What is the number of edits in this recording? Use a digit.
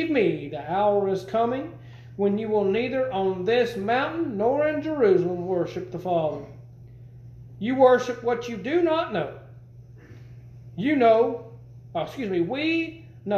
0